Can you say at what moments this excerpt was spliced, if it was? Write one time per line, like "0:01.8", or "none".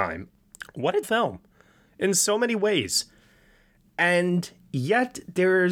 0:01.0